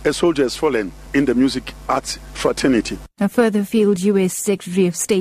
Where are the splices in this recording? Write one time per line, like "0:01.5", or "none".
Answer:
0:03.1